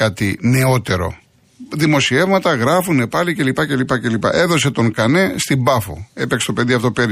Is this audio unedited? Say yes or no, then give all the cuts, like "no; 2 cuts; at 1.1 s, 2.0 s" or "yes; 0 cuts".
yes; 0 cuts